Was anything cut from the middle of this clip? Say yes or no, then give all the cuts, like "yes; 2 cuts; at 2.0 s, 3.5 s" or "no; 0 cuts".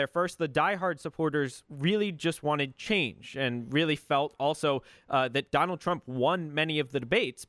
no; 0 cuts